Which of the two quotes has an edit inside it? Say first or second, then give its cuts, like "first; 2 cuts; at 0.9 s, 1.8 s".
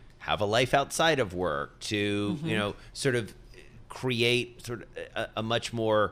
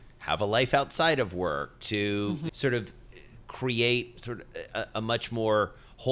second; 1 cut; at 2.5 s